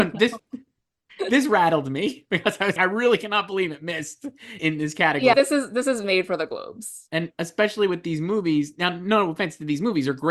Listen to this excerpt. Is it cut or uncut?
cut